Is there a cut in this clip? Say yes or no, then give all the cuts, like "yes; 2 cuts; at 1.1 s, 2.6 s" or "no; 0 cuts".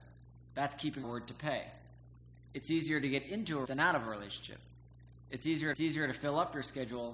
yes; 3 cuts; at 1.0 s, 3.6 s, 5.7 s